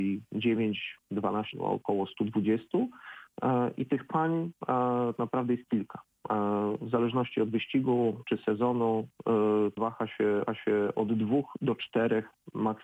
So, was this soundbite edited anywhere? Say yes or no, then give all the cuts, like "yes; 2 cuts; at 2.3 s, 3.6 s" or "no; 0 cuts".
yes; 4 cuts; at 1.5 s, 5.2 s, 9.8 s, 10.5 s